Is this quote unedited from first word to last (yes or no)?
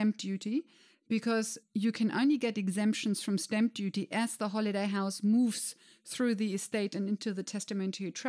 yes